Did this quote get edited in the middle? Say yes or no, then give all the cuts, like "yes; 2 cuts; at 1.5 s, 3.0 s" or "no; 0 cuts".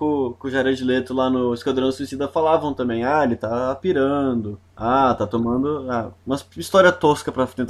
yes; 2 cuts; at 4.7 s, 6.2 s